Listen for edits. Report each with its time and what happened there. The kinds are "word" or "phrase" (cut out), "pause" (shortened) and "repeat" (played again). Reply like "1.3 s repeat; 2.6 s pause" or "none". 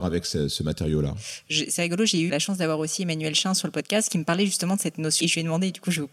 2.3 s word; 5.2 s phrase